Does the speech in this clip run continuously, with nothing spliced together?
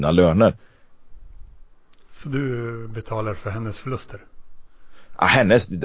yes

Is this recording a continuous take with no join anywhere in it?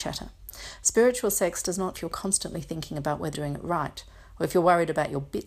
no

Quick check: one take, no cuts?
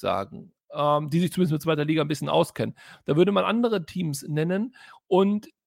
yes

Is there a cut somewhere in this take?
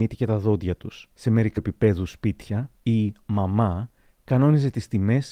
yes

